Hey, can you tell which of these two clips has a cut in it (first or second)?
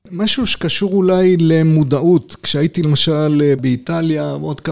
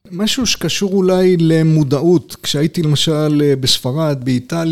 first